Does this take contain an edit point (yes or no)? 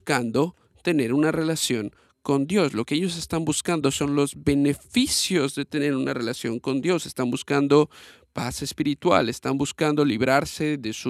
no